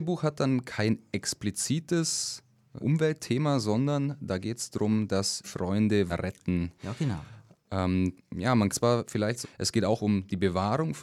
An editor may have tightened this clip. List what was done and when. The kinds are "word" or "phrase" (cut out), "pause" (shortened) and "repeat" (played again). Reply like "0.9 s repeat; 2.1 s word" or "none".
2.8 s word; 5.4 s word; 6.1 s word; 8.2 s word; 8.7 s word; 9.4 s word